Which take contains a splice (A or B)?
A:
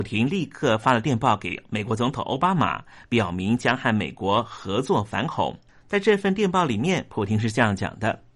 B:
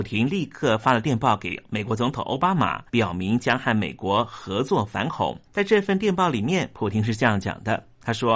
B